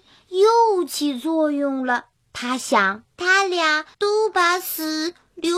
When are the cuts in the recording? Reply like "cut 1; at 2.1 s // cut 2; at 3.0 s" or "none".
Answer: cut 1; at 2.1 s // cut 2; at 3.1 s // cut 3; at 3.9 s